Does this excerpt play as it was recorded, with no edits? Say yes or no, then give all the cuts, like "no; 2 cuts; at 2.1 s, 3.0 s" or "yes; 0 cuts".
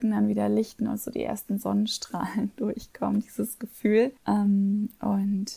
no; 1 cut; at 4.2 s